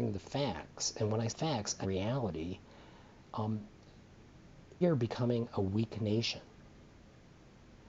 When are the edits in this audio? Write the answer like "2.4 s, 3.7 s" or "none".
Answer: 1.3 s, 1.8 s, 4.8 s